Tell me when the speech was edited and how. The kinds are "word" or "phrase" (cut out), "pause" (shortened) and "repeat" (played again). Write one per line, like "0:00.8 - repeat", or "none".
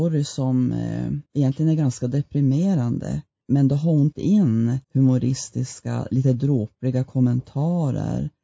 0:01.3 - pause
0:03.4 - word
0:04.1 - word
0:04.8 - pause